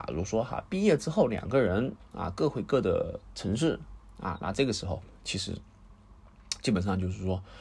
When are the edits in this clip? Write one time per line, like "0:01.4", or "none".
none